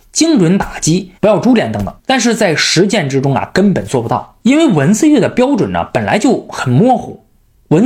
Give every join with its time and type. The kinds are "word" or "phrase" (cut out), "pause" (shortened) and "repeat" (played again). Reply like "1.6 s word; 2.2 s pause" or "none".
1.2 s pause; 2.0 s pause; 4.4 s pause